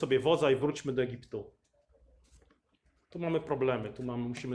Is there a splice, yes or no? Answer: no